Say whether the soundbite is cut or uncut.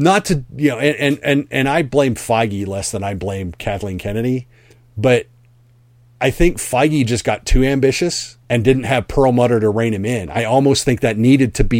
cut